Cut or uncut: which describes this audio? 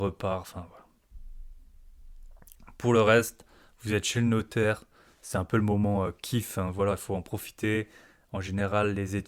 uncut